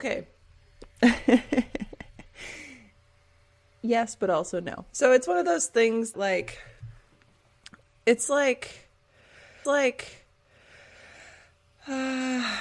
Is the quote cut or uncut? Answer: cut